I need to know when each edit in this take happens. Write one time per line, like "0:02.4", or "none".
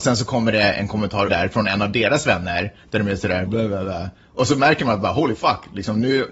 0:01.3
0:03.5